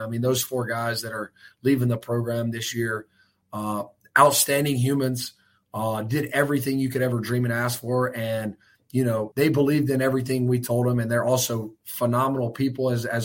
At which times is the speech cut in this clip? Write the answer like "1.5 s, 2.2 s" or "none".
9.3 s